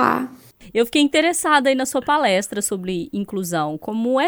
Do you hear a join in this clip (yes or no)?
no